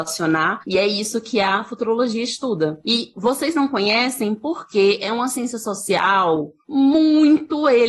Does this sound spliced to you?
no; 0 cuts

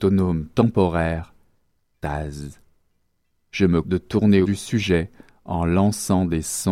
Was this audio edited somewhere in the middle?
yes; 2 cuts; at 3.8 s, 4.4 s

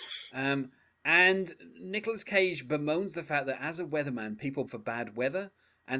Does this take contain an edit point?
yes; 1 cut; at 4.7 s

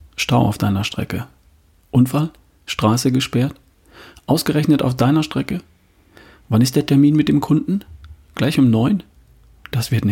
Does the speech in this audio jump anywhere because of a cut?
no; 0 cuts

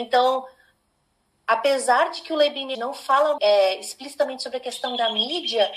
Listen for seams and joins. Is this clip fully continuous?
no; 2 cuts; at 2.7 s, 3.4 s

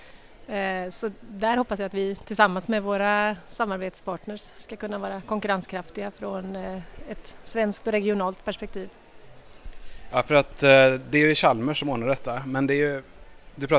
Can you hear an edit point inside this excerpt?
no; 0 cuts

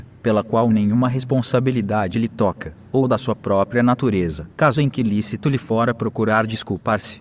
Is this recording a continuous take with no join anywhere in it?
no; 1 cut; at 4.5 s

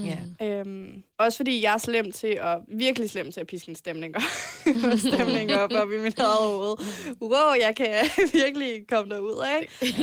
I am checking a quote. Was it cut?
yes; 1 cut; at 1.1 s

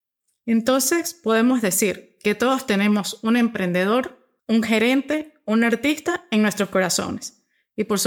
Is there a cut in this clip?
yes; 1 cut; at 4.4 s

